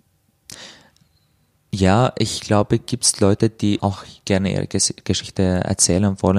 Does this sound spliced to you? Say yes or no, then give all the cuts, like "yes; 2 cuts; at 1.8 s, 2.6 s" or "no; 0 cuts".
yes; 1 cut; at 3.8 s